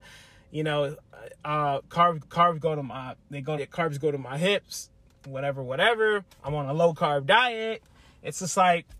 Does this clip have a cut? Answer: yes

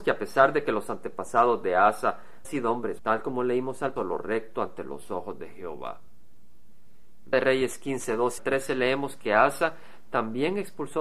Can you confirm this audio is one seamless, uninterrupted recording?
no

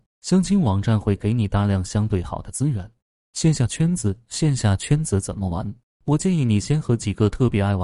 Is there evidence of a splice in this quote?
no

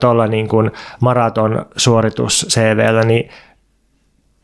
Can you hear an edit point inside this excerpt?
no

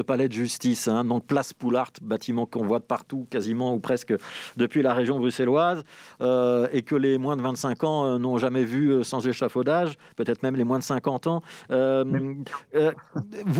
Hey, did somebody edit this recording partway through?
no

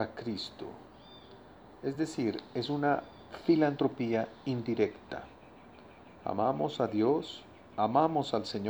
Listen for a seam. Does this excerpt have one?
no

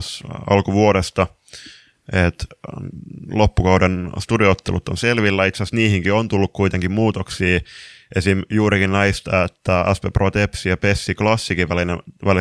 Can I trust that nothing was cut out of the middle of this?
yes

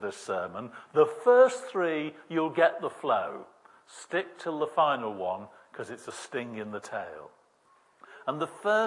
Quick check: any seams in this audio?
no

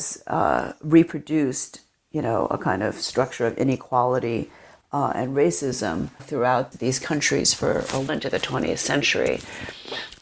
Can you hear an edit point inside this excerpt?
yes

